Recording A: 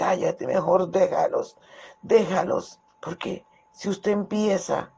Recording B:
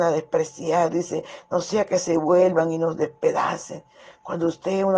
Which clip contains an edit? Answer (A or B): A